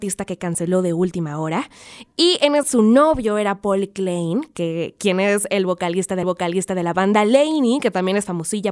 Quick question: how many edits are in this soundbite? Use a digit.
2